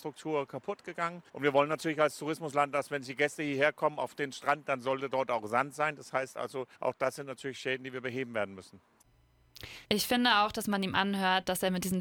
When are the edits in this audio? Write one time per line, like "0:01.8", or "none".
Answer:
0:01.3
0:06.7
0:09.8

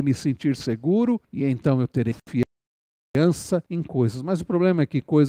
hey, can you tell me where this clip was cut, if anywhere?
0:01.2
0:03.7

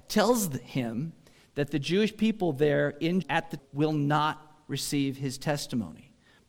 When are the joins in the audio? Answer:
0:03.2
0:03.6

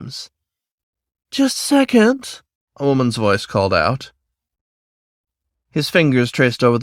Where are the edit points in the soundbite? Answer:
none

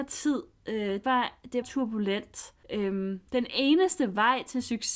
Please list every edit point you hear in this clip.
0:01.0
0:01.6
0:02.6

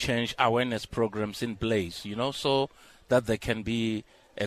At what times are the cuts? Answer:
none

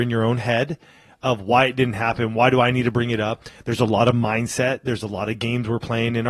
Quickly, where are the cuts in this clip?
none

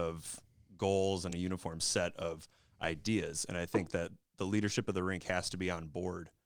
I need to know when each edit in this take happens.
none

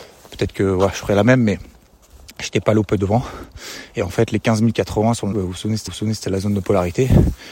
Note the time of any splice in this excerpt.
0:03.0
0:05.3
0:05.9

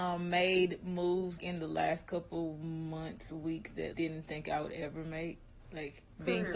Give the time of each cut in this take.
0:01.4
0:03.9

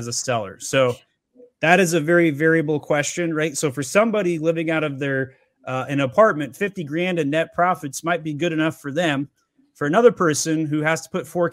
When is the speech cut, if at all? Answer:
none

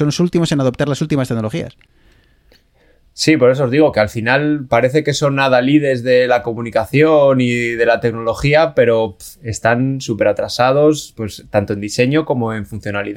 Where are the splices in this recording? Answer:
none

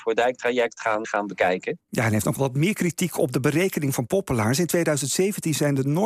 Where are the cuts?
0:01.0
0:02.4

